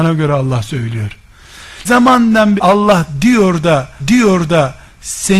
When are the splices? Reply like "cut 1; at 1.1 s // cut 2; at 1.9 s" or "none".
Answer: cut 1; at 1.8 s // cut 2; at 2.6 s // cut 3; at 4.0 s